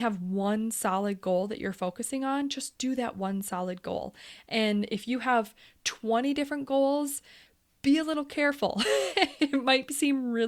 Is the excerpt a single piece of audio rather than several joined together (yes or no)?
yes